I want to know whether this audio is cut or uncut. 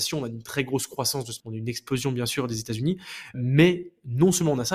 cut